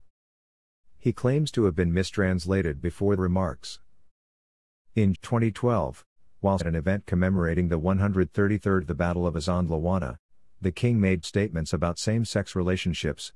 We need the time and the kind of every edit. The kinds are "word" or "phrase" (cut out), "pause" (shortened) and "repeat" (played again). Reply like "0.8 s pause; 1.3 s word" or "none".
3.2 s word; 5.1 s word; 6.6 s word; 8.8 s word; 11.2 s word